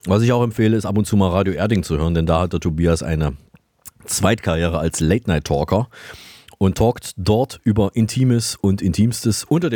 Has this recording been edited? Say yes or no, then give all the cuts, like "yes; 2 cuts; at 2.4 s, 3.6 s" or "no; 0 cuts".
no; 0 cuts